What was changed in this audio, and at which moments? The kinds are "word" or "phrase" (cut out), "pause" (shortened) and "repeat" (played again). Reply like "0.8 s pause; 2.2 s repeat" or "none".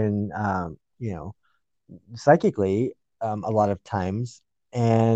none